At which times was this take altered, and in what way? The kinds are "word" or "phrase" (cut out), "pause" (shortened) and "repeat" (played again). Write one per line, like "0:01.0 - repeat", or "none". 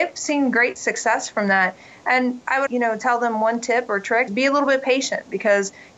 0:02.7 - word
0:04.3 - word